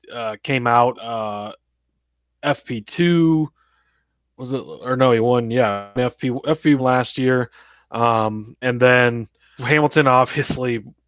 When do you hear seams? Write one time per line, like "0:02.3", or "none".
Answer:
0:01.0
0:06.8
0:08.6
0:09.6